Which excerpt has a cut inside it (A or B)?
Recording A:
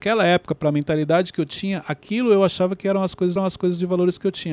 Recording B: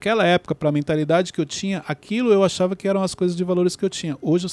A